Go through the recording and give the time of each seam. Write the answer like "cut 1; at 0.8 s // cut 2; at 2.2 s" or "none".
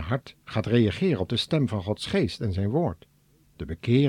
none